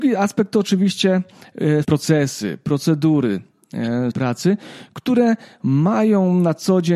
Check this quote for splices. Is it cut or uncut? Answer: cut